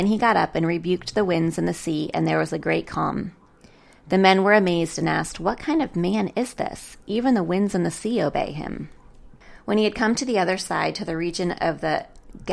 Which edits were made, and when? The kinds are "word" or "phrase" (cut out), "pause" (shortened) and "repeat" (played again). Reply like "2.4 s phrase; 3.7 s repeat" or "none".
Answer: none